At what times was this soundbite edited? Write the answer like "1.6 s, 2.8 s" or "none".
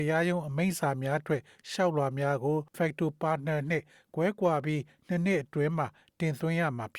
2.7 s